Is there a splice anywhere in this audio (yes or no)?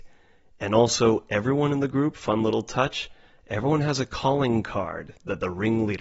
no